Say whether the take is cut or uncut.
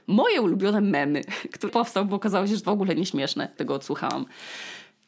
cut